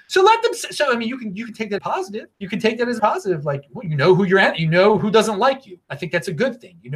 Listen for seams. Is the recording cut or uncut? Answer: cut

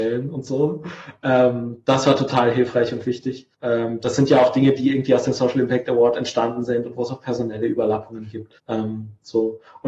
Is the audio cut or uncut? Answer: cut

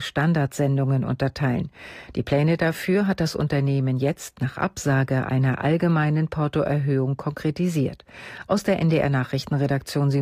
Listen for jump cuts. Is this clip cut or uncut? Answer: uncut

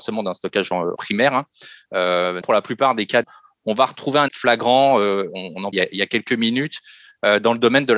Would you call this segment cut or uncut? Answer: cut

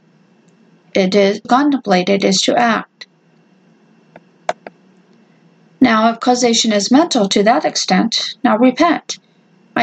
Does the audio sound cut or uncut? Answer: cut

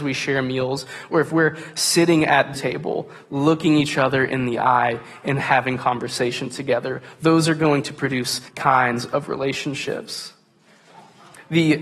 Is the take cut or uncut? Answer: cut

